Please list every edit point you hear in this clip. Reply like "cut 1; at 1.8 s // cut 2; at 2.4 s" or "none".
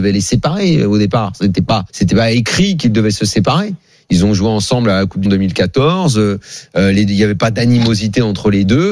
cut 1; at 1.9 s // cut 2; at 5.3 s